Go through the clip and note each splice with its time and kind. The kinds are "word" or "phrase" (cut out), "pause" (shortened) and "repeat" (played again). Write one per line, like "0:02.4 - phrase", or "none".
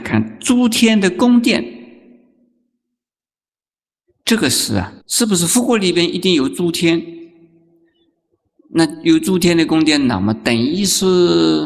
0:05.0 - pause